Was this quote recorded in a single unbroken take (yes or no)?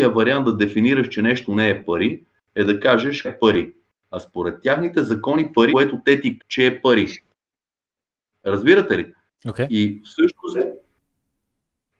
no